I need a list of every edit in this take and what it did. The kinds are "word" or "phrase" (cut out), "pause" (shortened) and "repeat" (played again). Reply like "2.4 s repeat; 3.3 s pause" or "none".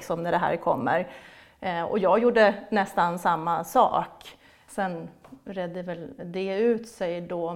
4.5 s pause